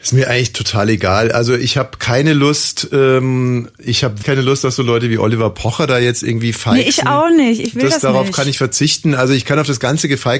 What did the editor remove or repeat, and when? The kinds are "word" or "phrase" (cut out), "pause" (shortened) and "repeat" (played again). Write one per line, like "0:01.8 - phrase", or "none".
0:04.2 - word